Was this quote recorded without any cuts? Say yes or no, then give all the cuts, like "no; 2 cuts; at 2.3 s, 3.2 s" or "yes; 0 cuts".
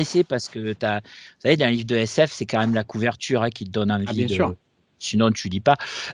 yes; 0 cuts